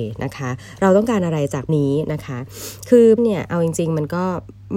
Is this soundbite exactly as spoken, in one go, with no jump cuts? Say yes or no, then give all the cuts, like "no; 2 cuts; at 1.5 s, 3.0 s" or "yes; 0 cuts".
no; 2 cuts; at 1.7 s, 3.2 s